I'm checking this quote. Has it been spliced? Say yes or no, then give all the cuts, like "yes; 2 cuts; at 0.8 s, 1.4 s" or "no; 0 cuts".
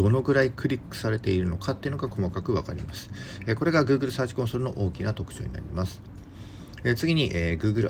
no; 0 cuts